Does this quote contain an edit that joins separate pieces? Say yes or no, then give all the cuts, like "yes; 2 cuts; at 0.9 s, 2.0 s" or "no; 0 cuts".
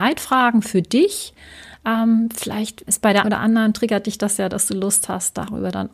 yes; 2 cuts; at 2.9 s, 3.2 s